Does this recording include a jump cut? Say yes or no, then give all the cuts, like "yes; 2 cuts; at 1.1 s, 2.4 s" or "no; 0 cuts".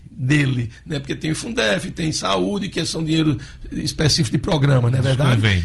no; 0 cuts